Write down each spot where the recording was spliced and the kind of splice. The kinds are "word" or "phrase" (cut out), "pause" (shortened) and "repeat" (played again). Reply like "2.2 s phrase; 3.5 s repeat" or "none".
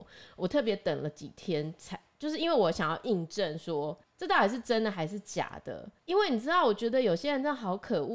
4.0 s pause; 6.0 s pause